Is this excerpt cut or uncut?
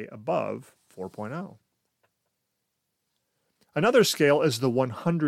uncut